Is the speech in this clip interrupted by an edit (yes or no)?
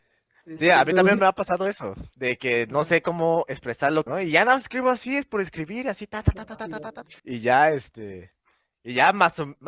yes